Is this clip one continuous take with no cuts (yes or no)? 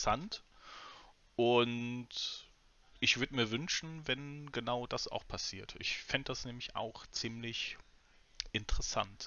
yes